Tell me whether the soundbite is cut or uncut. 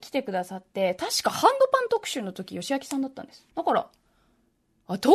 cut